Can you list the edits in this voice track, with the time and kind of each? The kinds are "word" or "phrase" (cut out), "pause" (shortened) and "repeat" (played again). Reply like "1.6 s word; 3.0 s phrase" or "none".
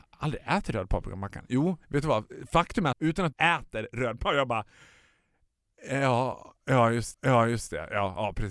1.8 s pause; 2.9 s phrase; 3.3 s phrase; 7.1 s repeat